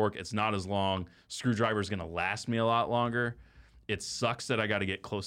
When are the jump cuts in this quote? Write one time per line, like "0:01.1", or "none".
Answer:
none